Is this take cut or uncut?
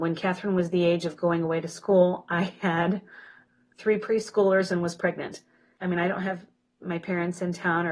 uncut